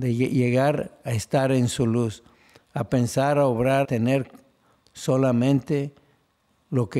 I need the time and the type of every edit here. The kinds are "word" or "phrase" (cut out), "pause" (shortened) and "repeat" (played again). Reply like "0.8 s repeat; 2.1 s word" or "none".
3.8 s word